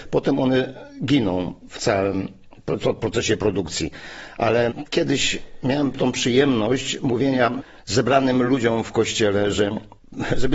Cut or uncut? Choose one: uncut